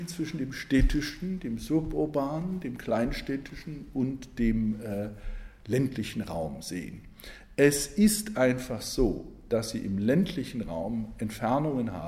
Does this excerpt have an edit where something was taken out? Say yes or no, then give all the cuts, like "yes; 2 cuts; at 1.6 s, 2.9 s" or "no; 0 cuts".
no; 0 cuts